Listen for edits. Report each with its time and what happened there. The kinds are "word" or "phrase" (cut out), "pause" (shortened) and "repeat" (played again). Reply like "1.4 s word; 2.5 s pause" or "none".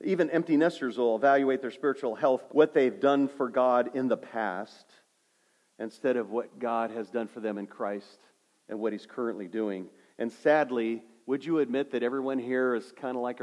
2.5 s word